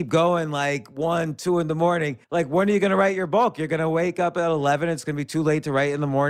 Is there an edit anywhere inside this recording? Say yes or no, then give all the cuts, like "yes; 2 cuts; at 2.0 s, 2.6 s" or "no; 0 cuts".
yes; 1 cut; at 2.2 s